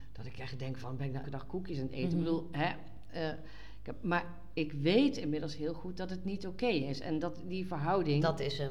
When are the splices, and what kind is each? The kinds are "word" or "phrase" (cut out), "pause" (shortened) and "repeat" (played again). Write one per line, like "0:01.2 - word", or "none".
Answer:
0:01.2 - word